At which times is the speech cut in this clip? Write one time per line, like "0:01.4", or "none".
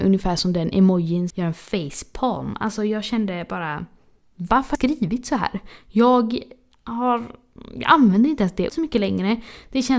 0:01.3
0:04.7
0:08.7